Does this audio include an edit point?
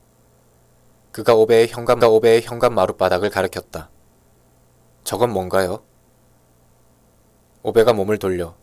yes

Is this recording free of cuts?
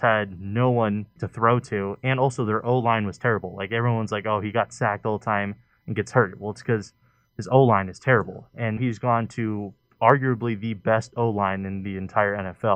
no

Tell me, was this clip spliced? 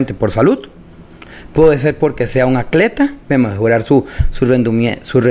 yes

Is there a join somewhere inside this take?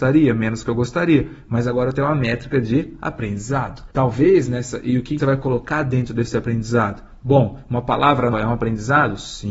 yes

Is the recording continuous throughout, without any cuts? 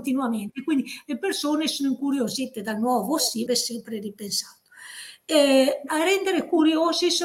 no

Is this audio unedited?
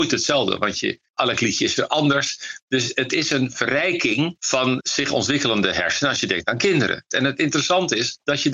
yes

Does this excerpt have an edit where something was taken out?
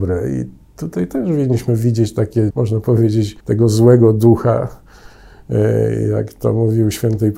yes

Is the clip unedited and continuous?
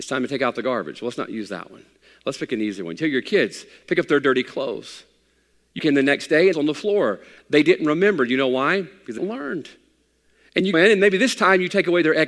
no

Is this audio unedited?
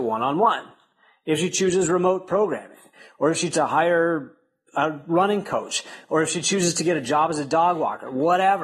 no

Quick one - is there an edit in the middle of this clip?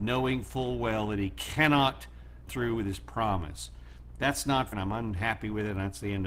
yes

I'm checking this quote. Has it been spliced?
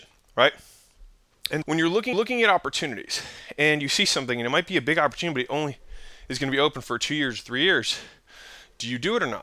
yes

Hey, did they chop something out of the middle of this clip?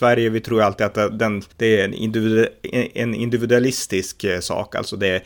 yes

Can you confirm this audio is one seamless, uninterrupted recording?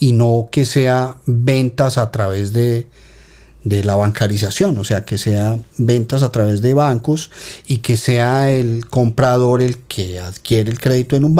yes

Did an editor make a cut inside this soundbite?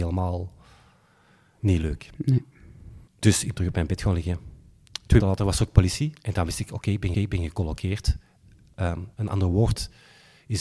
yes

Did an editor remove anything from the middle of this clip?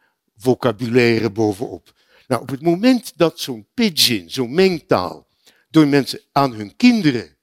no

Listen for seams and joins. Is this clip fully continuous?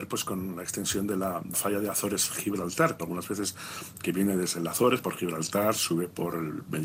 no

